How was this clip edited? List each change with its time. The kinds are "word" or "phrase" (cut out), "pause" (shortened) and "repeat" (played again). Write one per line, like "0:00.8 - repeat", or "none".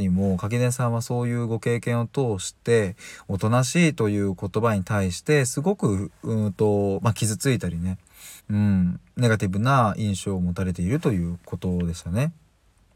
0:08.4 - pause